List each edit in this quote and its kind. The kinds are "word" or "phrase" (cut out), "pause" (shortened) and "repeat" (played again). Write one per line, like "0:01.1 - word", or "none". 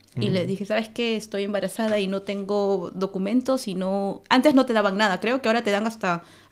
none